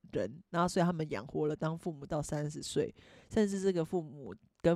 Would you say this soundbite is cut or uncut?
uncut